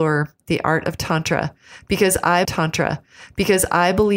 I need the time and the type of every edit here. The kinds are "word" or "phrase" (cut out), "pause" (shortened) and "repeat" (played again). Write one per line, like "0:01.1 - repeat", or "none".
0:02.4 - repeat